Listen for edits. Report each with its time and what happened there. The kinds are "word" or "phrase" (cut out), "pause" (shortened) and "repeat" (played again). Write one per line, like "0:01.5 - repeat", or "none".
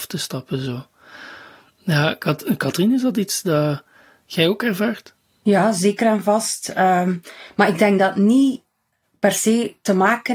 none